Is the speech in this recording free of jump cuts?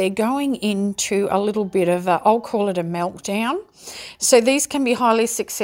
yes; 0 cuts

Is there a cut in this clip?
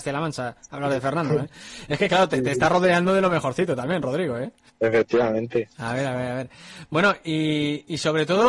yes; 1 cut; at 4.7 s

